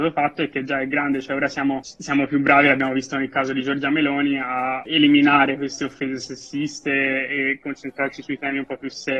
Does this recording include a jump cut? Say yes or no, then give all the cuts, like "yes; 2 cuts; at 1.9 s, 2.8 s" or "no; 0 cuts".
no; 0 cuts